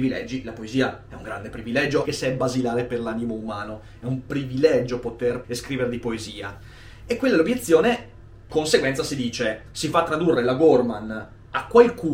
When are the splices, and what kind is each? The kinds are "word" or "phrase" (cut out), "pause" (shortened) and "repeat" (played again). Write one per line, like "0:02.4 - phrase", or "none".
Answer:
0:02.1 - word
0:05.4 - word
0:08.5 - word